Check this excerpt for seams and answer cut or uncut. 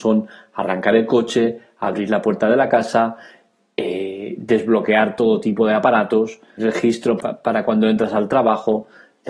cut